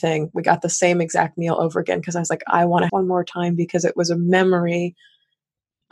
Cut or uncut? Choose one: cut